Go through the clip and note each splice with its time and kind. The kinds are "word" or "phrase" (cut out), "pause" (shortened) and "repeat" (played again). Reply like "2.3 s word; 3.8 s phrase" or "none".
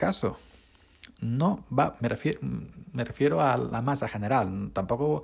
2.0 s word